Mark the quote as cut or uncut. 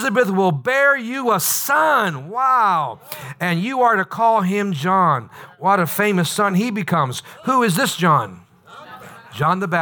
uncut